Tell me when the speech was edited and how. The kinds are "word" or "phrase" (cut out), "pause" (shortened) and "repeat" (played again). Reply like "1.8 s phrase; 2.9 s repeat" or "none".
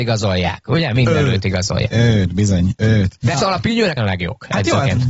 3.3 s word; 4.0 s phrase